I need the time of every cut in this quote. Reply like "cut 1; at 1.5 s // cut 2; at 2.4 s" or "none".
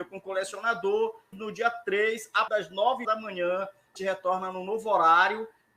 cut 1; at 1.3 s // cut 2; at 2.5 s // cut 3; at 3.0 s // cut 4; at 4.0 s